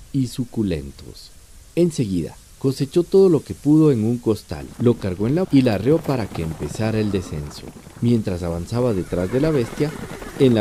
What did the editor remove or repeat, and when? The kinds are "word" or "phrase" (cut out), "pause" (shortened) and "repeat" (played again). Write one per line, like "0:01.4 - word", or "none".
0:05.4 - word